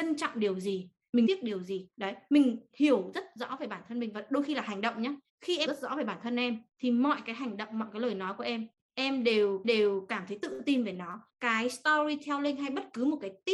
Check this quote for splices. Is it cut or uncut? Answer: cut